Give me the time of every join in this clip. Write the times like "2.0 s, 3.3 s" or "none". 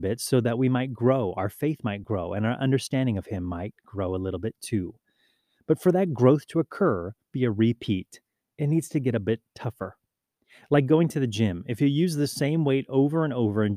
7.3 s